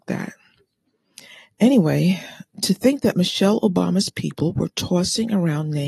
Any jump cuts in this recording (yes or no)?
no